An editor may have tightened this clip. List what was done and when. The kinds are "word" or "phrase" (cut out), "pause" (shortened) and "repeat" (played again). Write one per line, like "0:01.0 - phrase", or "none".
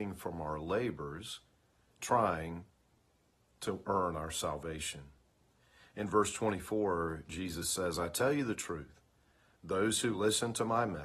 none